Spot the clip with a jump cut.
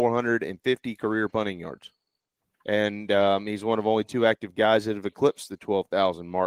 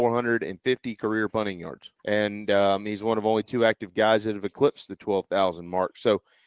second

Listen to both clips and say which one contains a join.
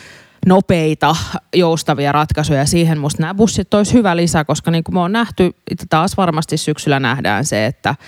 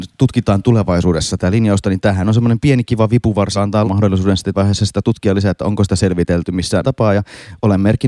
second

